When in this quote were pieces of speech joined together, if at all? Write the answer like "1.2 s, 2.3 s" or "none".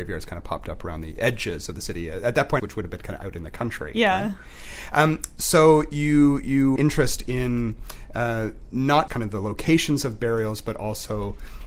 2.6 s, 6.8 s, 9.1 s